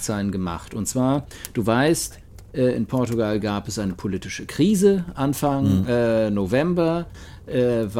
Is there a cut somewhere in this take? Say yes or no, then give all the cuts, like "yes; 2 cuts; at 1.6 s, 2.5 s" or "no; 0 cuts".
no; 0 cuts